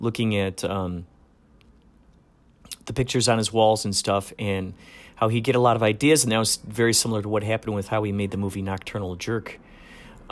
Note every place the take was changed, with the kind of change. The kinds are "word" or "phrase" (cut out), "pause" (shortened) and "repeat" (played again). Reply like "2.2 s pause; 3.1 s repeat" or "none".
none